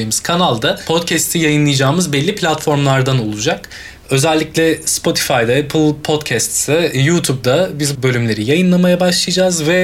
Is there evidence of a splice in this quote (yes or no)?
yes